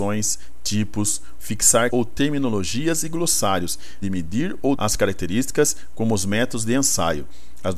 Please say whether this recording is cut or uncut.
cut